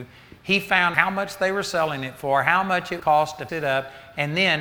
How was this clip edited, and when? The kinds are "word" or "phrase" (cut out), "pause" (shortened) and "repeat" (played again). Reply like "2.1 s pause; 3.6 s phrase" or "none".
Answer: 0.9 s word; 3.0 s word; 3.5 s word